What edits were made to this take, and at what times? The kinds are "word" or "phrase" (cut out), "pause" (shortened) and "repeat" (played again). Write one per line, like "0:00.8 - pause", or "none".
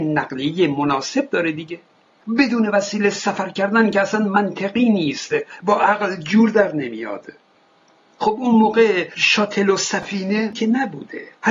none